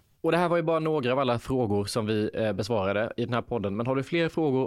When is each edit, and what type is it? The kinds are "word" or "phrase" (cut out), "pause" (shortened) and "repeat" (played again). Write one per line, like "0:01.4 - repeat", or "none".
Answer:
none